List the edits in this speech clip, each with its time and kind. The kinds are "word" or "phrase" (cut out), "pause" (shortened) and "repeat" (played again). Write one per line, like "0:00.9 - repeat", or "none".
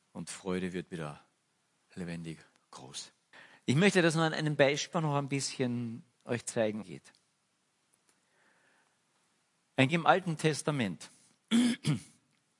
0:03.3 - pause
0:04.6 - word
0:04.9 - word
0:06.1 - pause
0:06.8 - phrase
0:09.9 - word